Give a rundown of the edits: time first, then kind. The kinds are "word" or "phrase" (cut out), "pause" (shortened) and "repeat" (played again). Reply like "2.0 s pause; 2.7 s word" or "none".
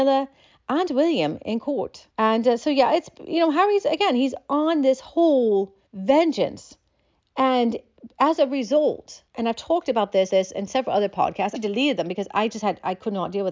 2.1 s pause; 5.9 s pause; 9.3 s pause; 10.3 s repeat; 11.5 s word